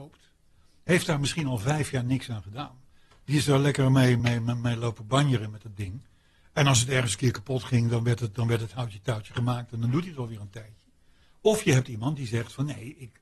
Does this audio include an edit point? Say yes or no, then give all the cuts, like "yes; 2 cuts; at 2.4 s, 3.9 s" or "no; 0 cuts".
no; 0 cuts